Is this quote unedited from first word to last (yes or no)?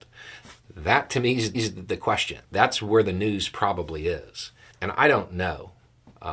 no